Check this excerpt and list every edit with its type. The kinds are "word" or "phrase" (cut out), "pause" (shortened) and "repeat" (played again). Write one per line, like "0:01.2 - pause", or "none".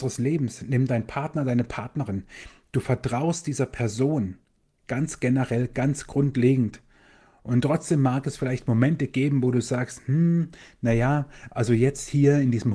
none